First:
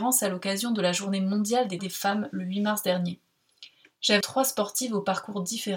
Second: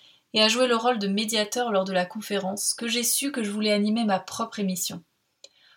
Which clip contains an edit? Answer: first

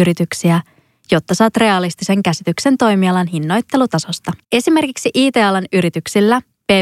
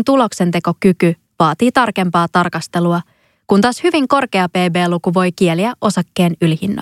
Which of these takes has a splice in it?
first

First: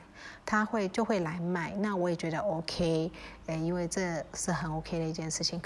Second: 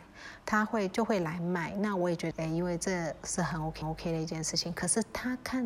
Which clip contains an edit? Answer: second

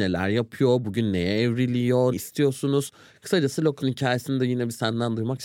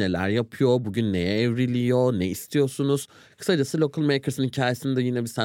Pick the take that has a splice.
first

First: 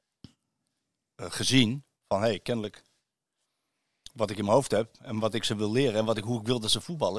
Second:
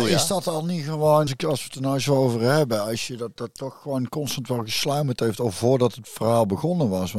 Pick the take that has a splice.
second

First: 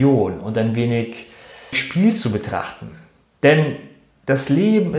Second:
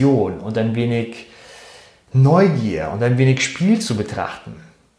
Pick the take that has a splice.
first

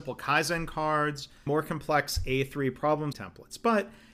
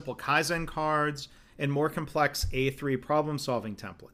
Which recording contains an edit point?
first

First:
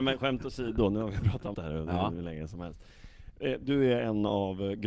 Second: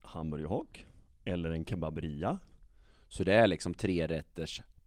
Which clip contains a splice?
first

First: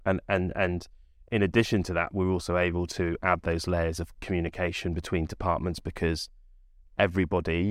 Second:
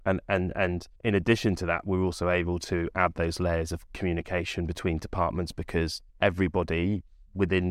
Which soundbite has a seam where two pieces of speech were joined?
second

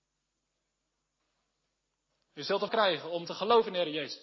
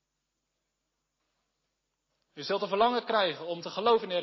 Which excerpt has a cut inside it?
first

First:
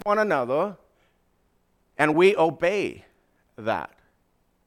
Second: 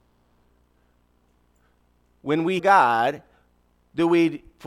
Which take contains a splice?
second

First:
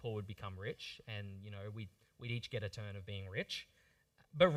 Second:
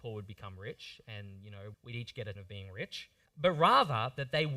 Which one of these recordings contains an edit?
second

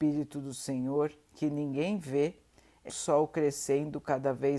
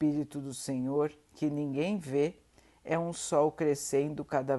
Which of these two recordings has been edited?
first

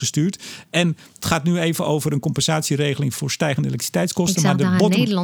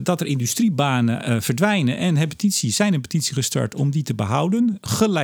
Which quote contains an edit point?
second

